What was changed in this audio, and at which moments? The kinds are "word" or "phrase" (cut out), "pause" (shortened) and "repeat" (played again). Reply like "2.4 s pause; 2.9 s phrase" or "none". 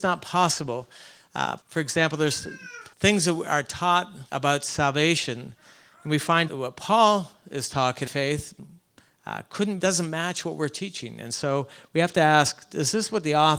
1.6 s pause; 2.9 s pause; 4.3 s pause; 6.5 s word; 8.1 s phrase; 9.8 s phrase